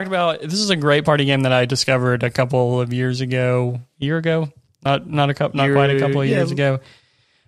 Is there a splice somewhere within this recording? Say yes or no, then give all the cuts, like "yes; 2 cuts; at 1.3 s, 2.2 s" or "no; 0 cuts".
no; 0 cuts